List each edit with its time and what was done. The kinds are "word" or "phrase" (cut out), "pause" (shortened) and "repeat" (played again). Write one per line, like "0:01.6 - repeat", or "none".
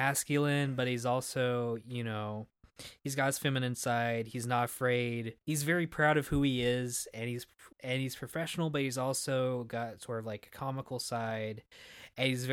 0:05.4 - pause
0:07.7 - pause